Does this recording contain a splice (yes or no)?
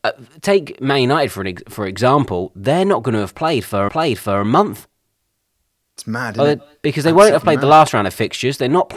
yes